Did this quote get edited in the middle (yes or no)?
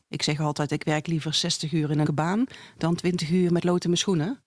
yes